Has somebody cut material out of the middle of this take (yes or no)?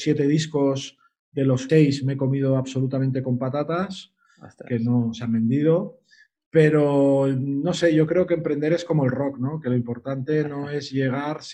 yes